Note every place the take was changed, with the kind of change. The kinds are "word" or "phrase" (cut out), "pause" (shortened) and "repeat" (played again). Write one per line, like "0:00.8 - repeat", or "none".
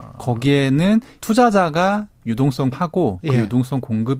0:01.2 - word
0:02.7 - word

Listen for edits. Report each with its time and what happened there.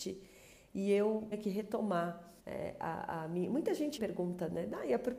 0:01.3 - word
0:02.4 - pause
0:04.0 - word

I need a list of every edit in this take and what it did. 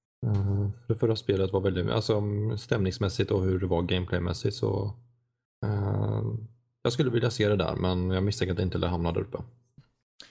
none

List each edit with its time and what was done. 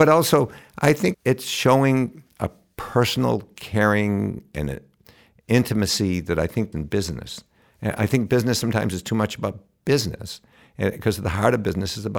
0:01.1 - word
0:06.7 - word

